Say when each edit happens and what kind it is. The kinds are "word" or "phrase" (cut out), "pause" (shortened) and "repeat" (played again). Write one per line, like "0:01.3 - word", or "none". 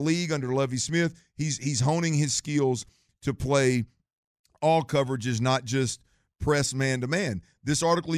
none